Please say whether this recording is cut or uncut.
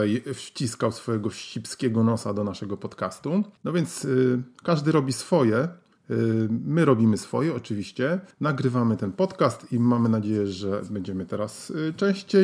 cut